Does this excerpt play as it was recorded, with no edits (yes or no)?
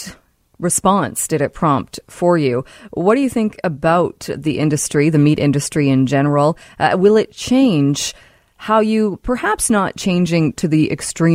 yes